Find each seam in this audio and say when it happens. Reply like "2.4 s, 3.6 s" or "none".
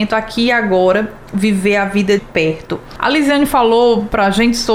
2.2 s